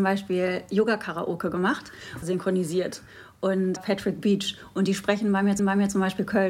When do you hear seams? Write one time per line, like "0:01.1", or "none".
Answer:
0:02.2
0:03.8
0:05.6